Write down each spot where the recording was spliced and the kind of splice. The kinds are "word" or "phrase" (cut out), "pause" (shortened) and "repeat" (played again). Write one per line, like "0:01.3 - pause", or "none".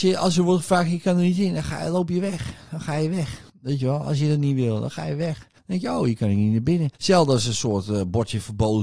0:03.5 - pause
0:05.6 - pause
0:07.0 - pause